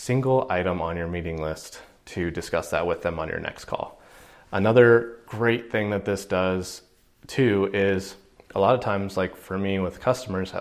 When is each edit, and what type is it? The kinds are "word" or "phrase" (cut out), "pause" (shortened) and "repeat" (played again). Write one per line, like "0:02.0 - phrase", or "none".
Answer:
none